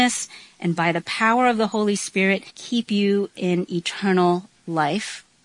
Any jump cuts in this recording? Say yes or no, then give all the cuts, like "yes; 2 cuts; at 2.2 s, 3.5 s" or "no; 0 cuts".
yes; 1 cut; at 2.5 s